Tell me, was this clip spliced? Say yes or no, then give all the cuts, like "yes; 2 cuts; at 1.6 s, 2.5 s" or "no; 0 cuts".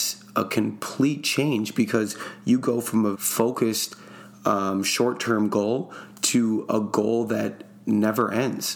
yes; 1 cut; at 3.1 s